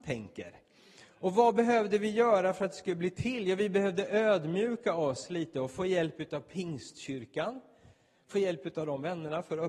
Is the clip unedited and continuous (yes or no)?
yes